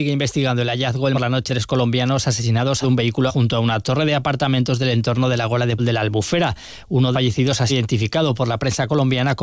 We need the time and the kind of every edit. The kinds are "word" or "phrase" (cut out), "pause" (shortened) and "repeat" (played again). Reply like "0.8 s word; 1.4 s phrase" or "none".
1.1 s phrase; 1.5 s word; 2.8 s phrase; 3.3 s word; 5.8 s word; 7.1 s phrase; 7.7 s word